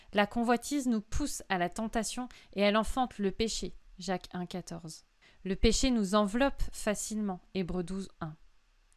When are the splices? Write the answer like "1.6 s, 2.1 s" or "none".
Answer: 5.2 s